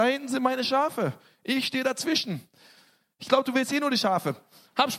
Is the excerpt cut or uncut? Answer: uncut